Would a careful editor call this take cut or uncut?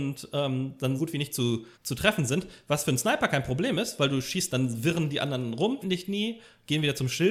cut